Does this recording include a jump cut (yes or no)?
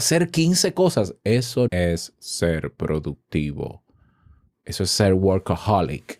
yes